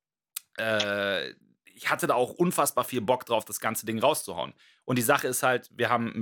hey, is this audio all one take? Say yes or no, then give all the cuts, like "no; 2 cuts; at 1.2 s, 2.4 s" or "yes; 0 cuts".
yes; 0 cuts